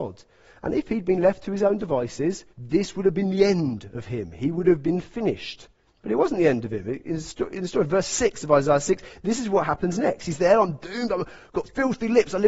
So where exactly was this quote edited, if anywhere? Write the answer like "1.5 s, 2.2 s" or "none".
2.5 s, 5.9 s